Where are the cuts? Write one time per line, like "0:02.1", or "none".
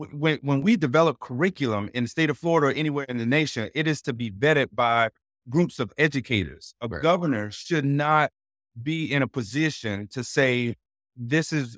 none